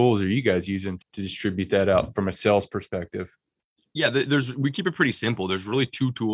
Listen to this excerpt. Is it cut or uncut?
cut